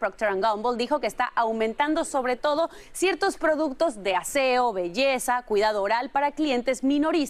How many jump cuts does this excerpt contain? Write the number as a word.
zero